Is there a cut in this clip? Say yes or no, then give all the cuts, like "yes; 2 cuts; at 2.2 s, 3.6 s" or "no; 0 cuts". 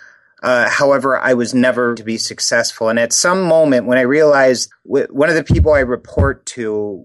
yes; 2 cuts; at 2.0 s, 4.7 s